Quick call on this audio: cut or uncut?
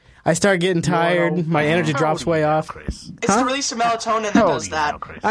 uncut